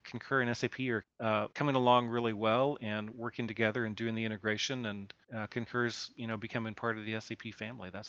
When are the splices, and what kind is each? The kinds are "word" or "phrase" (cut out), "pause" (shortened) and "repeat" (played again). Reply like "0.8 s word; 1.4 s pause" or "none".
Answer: 1.0 s word; 1.5 s pause; 5.2 s pause